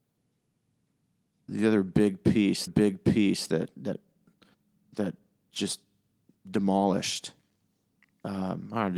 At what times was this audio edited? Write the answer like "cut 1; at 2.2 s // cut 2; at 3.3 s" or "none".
cut 1; at 1.5 s // cut 2; at 2.7 s